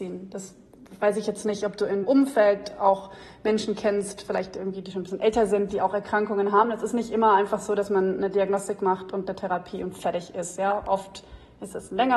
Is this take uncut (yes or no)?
no